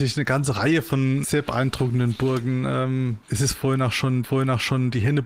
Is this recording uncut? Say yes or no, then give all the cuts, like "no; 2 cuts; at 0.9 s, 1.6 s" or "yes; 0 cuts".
no; 3 cuts; at 1.2 s, 3.2 s, 4.2 s